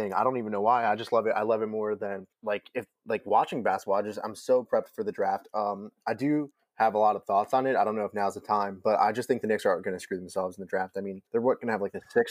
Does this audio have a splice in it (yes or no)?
yes